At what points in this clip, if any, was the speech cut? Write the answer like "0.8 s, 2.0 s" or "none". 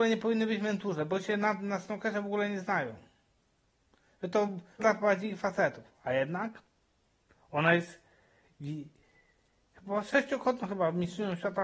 4.8 s